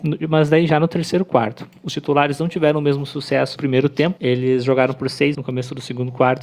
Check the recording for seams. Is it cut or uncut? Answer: cut